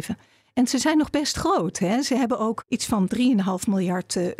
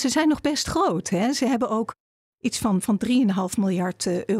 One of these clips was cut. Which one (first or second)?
first